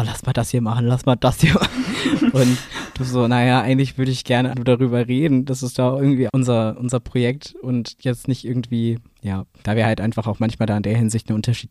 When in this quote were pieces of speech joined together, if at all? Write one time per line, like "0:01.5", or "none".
0:04.5
0:06.3

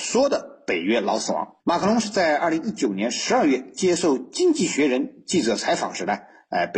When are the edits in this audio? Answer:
0:01.6

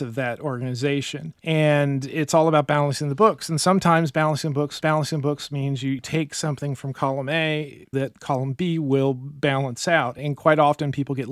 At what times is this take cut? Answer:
0:01.4
0:04.8
0:07.9

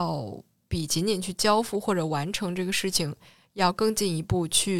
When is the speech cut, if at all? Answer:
none

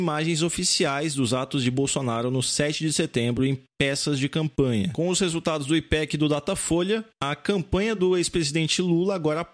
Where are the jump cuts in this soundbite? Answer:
none

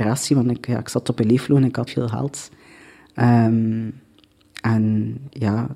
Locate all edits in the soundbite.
0:01.9

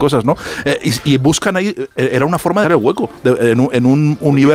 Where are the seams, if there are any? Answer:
0:02.6

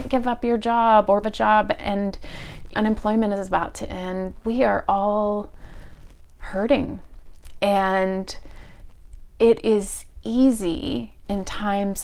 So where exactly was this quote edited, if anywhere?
0:01.2
0:02.7
0:04.4

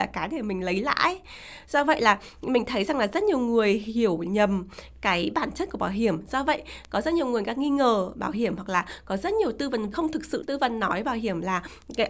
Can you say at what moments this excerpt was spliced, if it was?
0:09.9
0:10.4

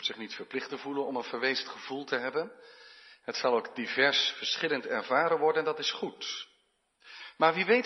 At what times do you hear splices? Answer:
none

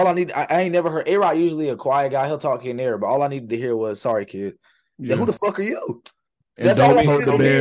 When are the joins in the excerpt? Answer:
none

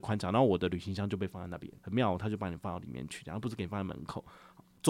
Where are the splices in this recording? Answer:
0:01.8

